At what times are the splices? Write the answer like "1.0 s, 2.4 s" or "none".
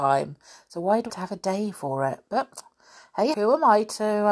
1.1 s, 3.3 s